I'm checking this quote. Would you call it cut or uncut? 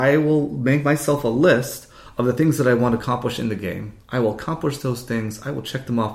uncut